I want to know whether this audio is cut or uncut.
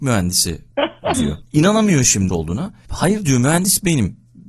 cut